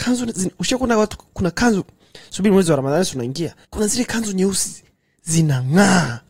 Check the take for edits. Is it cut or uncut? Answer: cut